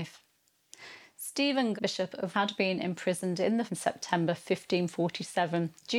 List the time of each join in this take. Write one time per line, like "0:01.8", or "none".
0:01.8
0:02.3
0:03.7